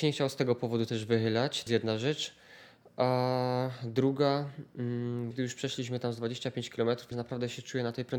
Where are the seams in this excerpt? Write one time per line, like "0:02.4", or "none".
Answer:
0:01.7
0:05.3
0:07.1